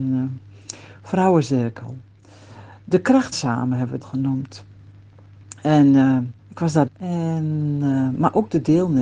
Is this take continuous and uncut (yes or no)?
no